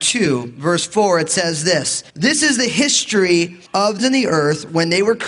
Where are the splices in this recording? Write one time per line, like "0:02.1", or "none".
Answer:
0:02.1
0:03.7
0:04.0